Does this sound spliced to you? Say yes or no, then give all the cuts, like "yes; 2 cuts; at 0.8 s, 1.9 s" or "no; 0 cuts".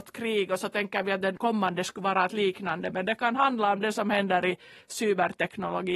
no; 0 cuts